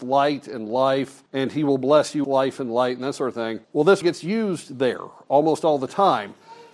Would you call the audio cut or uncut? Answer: cut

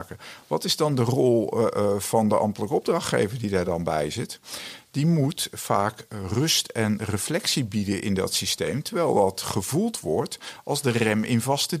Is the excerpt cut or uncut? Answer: uncut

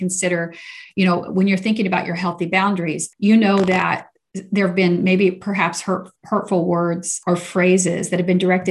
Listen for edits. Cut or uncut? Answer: uncut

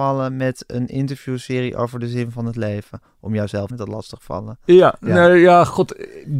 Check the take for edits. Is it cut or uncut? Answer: cut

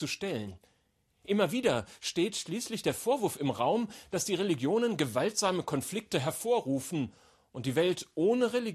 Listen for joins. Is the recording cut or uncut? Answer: uncut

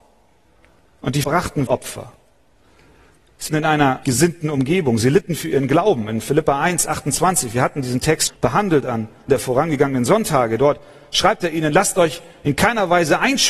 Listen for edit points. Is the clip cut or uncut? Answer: cut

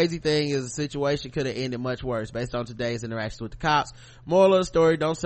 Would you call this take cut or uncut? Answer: uncut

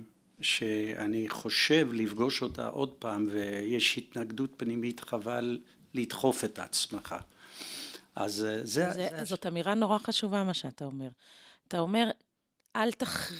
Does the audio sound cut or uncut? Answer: uncut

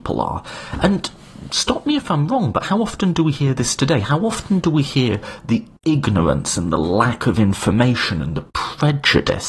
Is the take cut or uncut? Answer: uncut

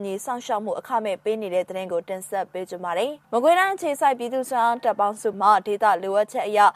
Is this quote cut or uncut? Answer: cut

